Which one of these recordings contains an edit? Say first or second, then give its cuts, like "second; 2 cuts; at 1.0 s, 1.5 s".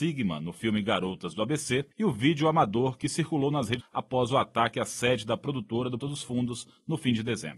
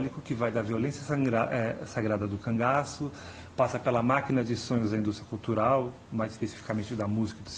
first; 3 cuts; at 1.9 s, 3.8 s, 6.0 s